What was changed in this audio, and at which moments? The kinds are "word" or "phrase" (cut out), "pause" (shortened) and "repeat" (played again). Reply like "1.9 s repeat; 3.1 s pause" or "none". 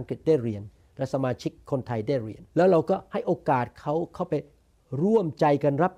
2.5 s pause